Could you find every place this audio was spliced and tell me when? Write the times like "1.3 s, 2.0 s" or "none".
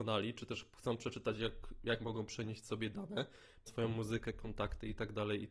3.7 s